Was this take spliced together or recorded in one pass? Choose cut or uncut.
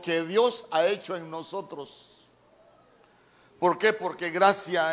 uncut